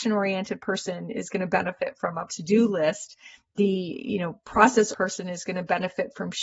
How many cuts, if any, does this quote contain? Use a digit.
2